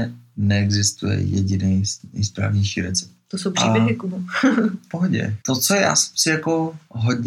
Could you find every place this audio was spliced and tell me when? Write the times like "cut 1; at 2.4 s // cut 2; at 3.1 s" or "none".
cut 1; at 4.9 s // cut 2; at 5.4 s